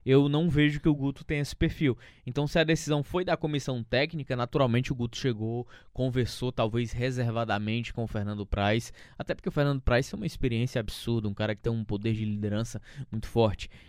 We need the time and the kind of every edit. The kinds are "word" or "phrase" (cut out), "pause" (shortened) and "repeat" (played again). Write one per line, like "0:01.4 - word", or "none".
none